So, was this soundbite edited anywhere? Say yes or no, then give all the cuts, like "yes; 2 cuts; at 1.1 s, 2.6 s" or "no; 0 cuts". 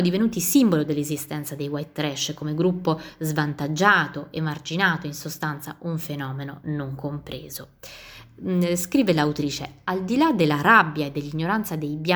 no; 0 cuts